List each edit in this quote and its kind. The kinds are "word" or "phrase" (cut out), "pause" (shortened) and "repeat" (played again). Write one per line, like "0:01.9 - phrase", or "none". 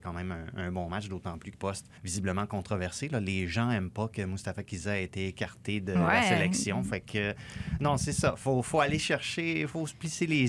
0:01.5 - phrase
0:02.0 - pause

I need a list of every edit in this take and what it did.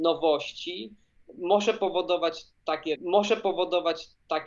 0:03.0 - repeat

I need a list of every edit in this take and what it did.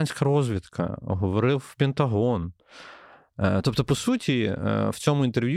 none

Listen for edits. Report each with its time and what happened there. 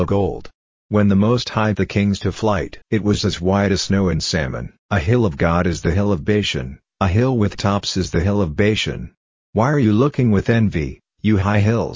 0:01.7 - word
0:02.8 - pause
0:04.8 - pause
0:07.5 - word

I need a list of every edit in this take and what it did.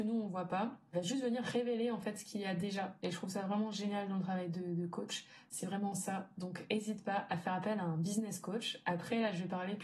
none

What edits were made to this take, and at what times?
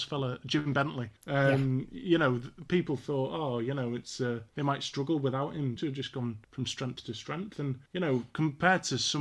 0:01.2 - pause
0:04.5 - pause
0:05.8 - phrase
0:06.4 - pause
0:07.9 - pause

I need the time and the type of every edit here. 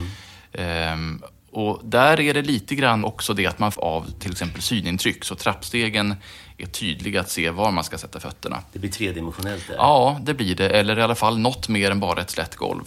0:03.0 - word
0:03.7 - phrase

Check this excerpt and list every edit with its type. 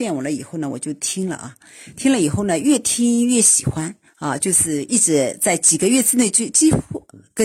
0:04.1 - pause

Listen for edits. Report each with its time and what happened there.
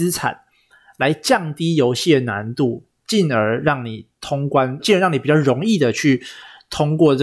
0:04.8 - word

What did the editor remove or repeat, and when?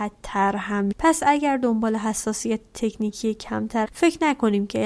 0:00.9 - word
0:03.8 - word

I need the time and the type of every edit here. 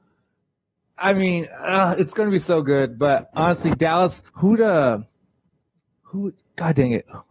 0:04.3 - pause

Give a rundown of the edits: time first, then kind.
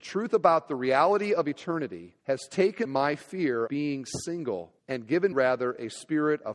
0:02.2 - pause
0:02.9 - word
0:03.7 - word
0:04.8 - pause
0:05.3 - word

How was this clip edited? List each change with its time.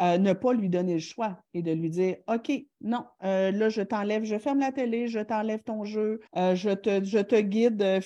0:06.3 - pause

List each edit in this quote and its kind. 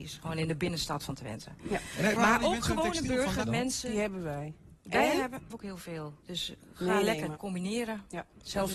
0:02.2 - word
0:03.4 - word
0:05.5 - phrase
0:07.4 - word

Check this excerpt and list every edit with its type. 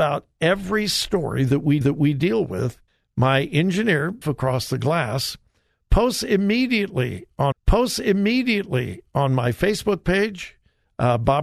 0:01.8 - repeat
0:02.9 - pause
0:04.2 - word
0:07.5 - repeat

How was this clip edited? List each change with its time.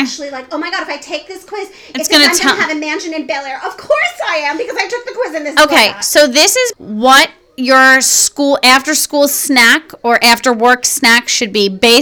0:06.7 - word

